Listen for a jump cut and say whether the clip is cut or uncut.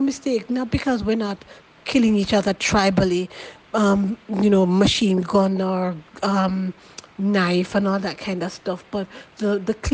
uncut